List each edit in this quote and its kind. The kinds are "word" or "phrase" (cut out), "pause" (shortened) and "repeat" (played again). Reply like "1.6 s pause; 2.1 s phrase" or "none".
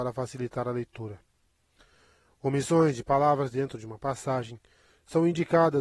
none